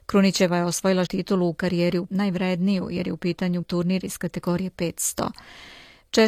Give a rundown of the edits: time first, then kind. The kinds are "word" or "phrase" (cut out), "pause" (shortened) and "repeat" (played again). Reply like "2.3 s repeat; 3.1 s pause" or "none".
1.1 s word; 2.1 s word; 3.6 s word